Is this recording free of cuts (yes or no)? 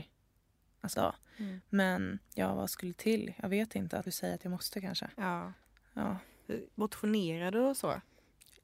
no